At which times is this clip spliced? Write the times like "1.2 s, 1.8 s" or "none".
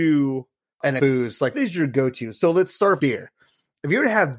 1.0 s, 1.5 s, 3.0 s